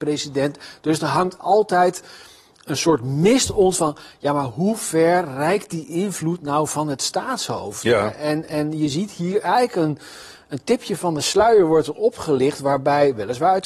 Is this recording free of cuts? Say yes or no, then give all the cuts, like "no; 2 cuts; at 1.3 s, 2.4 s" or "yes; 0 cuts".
yes; 0 cuts